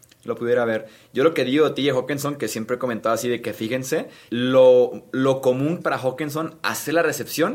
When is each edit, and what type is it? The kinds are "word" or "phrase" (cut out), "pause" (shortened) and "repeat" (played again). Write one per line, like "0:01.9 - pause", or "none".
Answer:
0:04.3 - word
0:05.8 - word